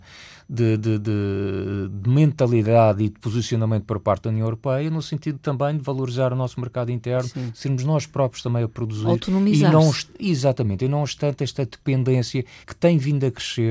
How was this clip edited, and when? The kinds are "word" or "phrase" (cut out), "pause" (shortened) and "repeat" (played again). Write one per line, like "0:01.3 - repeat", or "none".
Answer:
0:12.6 - pause